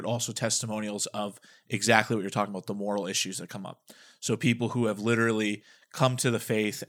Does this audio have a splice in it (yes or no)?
no